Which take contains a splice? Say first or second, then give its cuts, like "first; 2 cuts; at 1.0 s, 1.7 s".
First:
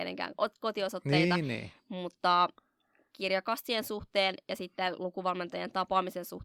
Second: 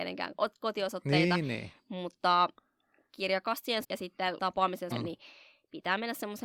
second; 3 cuts; at 3.8 s, 4.4 s, 4.9 s